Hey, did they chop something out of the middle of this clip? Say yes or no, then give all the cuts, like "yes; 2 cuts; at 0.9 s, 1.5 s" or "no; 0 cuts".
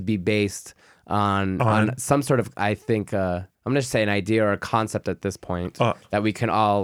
yes; 1 cut; at 3.5 s